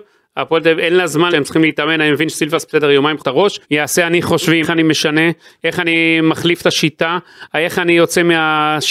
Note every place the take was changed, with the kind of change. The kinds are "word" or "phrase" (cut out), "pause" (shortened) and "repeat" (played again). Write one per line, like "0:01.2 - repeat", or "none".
0:01.3 - word
0:03.2 - phrase
0:03.6 - pause
0:04.6 - phrase